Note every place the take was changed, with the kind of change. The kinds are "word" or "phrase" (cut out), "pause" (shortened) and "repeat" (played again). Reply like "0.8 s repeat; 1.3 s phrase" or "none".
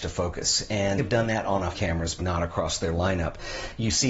1.0 s word; 1.7 s word; 2.2 s word